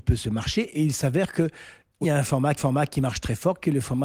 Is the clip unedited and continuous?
no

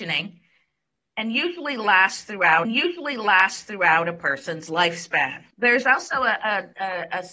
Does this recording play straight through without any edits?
no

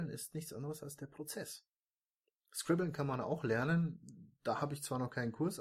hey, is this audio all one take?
yes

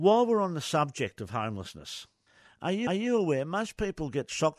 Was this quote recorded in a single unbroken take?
no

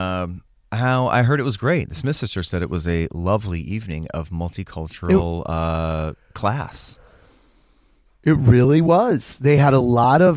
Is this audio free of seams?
yes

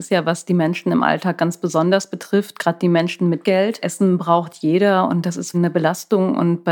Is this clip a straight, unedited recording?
no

